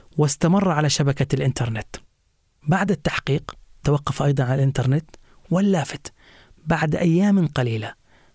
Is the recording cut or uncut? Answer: uncut